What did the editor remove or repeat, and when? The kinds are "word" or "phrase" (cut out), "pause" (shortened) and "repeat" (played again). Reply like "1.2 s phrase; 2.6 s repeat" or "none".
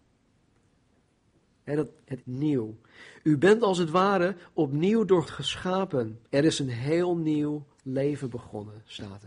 2.2 s phrase; 5.2 s word; 6.3 s pause